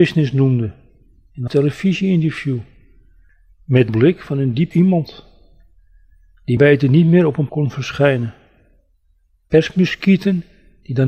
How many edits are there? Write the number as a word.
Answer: five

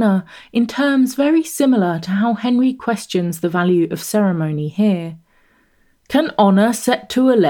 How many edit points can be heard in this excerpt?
zero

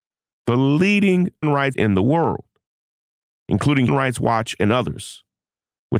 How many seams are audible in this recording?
three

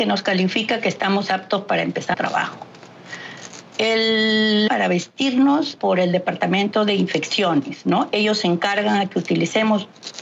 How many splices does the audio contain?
three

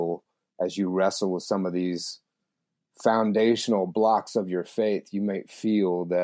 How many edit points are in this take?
zero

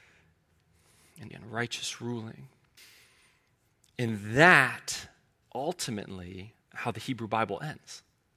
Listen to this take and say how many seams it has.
four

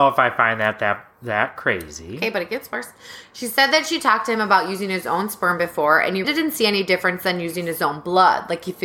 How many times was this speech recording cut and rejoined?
one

